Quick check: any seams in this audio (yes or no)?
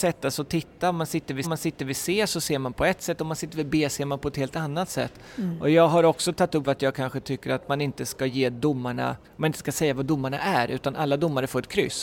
yes